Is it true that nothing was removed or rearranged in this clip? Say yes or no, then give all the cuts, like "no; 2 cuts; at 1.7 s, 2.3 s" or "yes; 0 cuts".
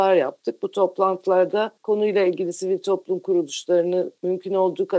yes; 0 cuts